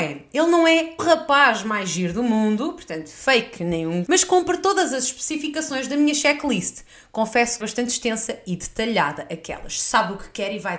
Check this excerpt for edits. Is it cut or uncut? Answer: cut